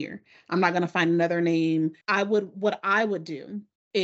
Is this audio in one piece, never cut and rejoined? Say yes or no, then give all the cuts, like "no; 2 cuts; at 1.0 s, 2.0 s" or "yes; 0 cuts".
no; 1 cut; at 2.0 s